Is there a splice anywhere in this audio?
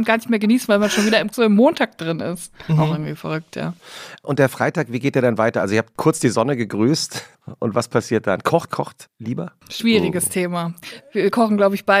yes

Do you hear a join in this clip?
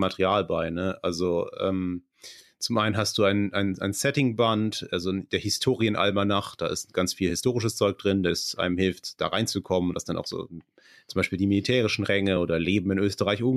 no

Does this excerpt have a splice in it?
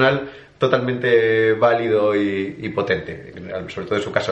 no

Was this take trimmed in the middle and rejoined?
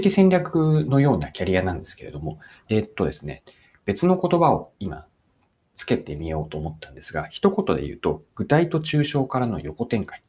yes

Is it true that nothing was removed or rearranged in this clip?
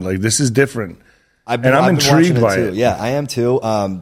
yes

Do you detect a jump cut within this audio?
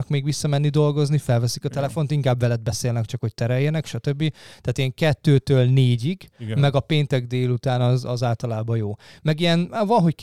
no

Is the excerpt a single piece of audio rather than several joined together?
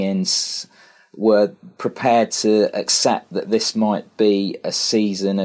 yes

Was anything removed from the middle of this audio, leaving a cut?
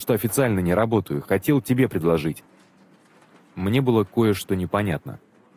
no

